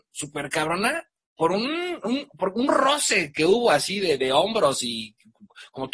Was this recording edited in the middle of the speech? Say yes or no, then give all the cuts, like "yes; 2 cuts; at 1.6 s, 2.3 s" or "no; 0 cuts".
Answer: no; 0 cuts